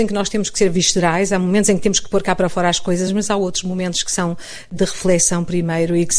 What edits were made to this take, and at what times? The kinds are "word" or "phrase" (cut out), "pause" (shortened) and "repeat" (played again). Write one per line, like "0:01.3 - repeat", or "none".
none